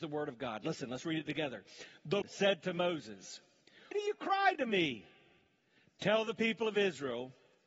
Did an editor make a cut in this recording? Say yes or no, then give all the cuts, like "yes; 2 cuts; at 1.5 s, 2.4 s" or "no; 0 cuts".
yes; 2 cuts; at 2.2 s, 3.9 s